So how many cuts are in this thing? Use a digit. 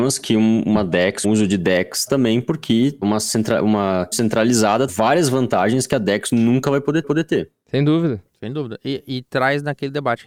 6